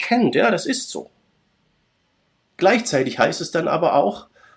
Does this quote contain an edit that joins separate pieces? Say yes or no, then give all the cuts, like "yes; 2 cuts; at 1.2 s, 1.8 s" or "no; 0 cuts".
yes; 1 cut; at 1.8 s